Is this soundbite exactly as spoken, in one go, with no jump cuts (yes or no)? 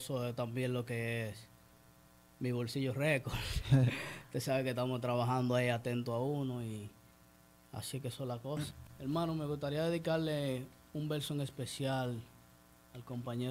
yes